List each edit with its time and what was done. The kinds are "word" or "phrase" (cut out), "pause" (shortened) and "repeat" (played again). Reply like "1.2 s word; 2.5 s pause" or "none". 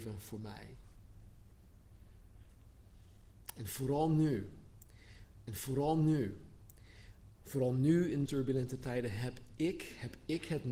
5.5 s repeat; 8.3 s word